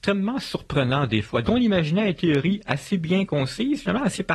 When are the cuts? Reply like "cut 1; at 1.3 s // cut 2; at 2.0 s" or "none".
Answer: cut 1; at 1.4 s // cut 2; at 2.2 s